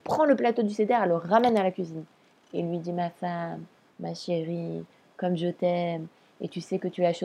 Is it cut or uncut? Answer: uncut